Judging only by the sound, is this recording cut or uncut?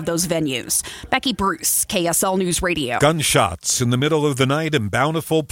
uncut